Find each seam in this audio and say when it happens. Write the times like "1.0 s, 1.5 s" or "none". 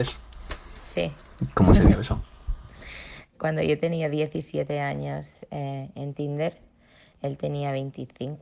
3.3 s